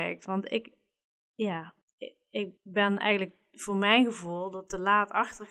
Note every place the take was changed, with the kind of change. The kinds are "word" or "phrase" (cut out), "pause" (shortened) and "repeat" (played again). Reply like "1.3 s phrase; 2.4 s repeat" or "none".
1.8 s pause; 2.6 s pause